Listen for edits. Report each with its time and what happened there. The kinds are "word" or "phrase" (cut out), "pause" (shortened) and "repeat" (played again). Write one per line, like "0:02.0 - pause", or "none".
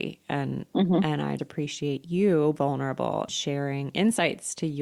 0:01.4 - word
0:02.6 - word
0:03.3 - word